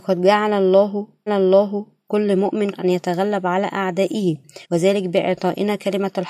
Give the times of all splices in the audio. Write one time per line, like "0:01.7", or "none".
0:01.3
0:02.7
0:04.6